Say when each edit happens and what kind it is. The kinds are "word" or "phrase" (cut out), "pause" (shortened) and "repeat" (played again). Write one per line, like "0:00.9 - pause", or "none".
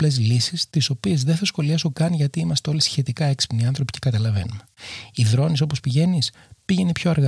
none